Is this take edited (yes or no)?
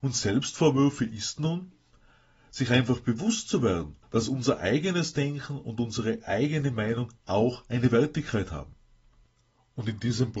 yes